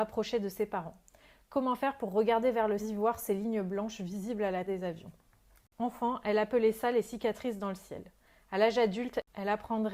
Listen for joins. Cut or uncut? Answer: cut